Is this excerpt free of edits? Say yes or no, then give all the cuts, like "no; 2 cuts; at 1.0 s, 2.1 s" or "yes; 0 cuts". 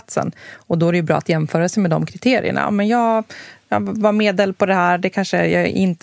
yes; 0 cuts